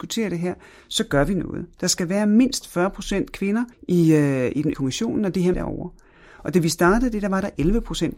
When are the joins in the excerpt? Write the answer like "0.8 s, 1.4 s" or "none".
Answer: 3.7 s, 4.7 s, 5.5 s